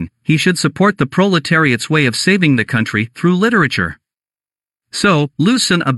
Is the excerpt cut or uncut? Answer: uncut